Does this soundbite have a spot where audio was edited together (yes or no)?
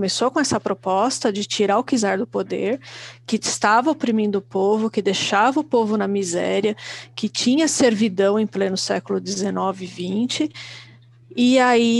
no